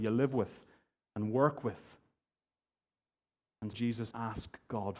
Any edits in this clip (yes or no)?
yes